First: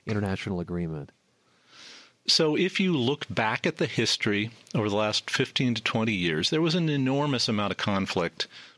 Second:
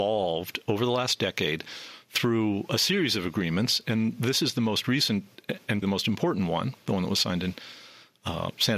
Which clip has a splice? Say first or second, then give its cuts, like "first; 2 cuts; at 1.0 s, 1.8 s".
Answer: second; 1 cut; at 5.8 s